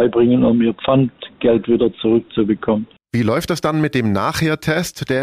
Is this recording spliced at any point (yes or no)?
no